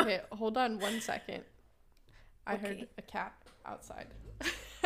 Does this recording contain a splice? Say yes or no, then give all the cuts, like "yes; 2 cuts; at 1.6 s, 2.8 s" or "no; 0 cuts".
no; 0 cuts